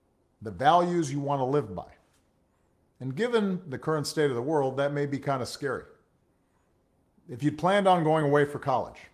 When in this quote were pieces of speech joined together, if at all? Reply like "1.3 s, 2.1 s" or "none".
none

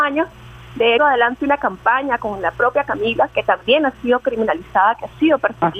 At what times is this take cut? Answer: 1.0 s

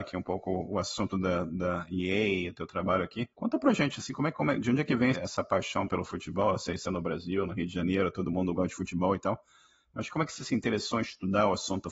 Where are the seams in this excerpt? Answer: 3.3 s, 5.1 s, 6.8 s

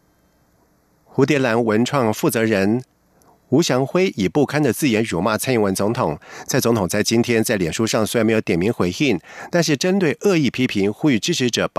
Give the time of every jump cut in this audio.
none

